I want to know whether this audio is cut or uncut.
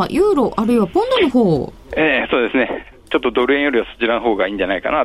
cut